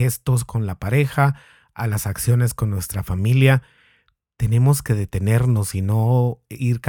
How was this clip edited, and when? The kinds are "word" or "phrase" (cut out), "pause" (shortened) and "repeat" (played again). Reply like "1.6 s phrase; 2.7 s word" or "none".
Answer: none